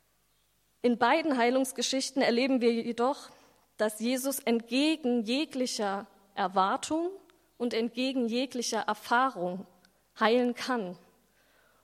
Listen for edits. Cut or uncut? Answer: uncut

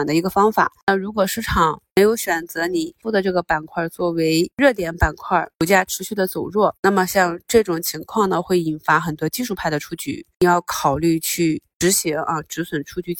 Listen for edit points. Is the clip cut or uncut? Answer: cut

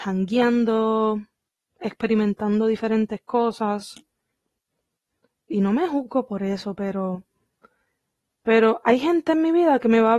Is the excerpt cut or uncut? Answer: uncut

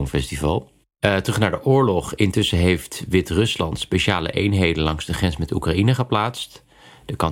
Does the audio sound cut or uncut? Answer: uncut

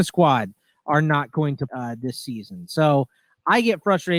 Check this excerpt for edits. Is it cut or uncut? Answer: cut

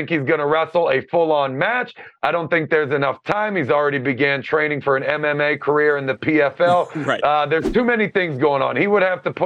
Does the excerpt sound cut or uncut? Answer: uncut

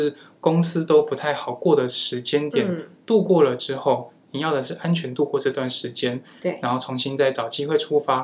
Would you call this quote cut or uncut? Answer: uncut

